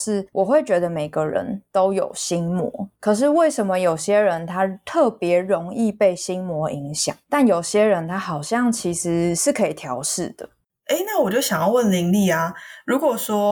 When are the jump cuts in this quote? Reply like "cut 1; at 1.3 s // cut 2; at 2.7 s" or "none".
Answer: cut 1; at 10.6 s

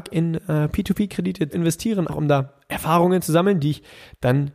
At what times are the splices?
cut 1; at 1.5 s // cut 2; at 2.1 s

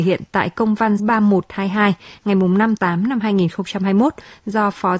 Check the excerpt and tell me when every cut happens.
cut 1; at 1.0 s // cut 2; at 2.8 s

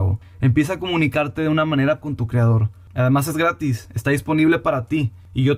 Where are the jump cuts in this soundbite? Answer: cut 1; at 2.0 s

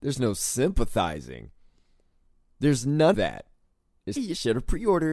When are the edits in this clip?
cut 1; at 3.1 s // cut 2; at 4.2 s

